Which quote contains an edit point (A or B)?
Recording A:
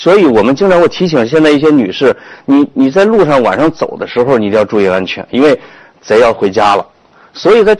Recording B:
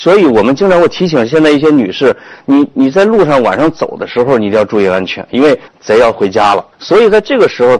B